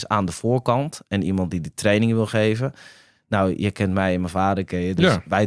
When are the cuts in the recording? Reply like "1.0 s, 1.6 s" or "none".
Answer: none